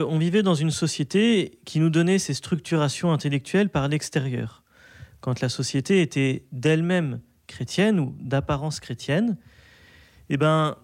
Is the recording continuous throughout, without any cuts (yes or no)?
yes